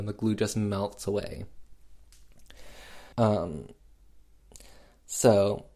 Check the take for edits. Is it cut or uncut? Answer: cut